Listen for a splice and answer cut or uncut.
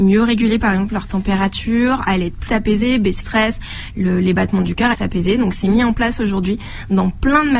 cut